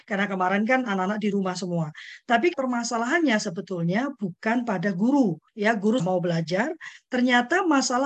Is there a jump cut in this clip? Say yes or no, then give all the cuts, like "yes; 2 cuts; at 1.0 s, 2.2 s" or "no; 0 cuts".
yes; 3 cuts; at 2.5 s, 5.5 s, 6.0 s